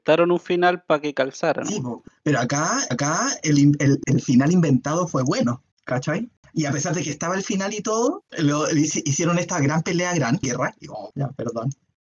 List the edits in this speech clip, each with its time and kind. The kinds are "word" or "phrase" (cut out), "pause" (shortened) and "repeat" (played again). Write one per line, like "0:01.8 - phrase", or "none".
0:02.9 - repeat
0:04.0 - word
0:05.7 - pause
0:08.3 - pause
0:10.4 - phrase
0:11.1 - word